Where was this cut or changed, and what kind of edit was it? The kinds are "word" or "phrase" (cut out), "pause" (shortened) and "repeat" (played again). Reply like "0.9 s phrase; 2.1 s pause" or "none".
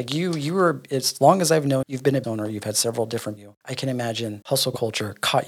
1.8 s word; 2.2 s word; 3.4 s phrase